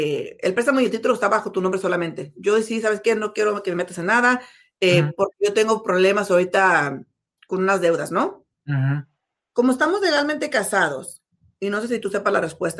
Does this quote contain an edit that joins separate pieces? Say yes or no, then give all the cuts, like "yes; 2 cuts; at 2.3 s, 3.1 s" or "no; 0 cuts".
no; 0 cuts